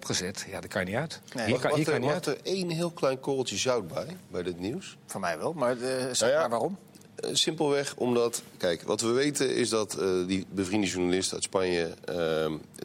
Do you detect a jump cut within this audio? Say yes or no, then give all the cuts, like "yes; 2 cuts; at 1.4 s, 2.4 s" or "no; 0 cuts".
no; 0 cuts